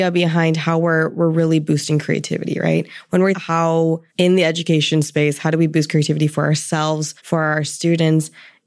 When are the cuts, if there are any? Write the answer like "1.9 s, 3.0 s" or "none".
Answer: 3.3 s, 4.1 s, 7.2 s